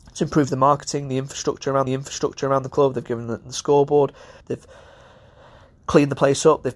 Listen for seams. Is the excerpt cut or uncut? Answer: cut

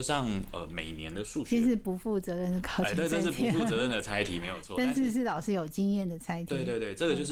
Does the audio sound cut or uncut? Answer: uncut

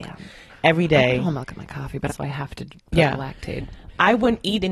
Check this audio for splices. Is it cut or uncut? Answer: cut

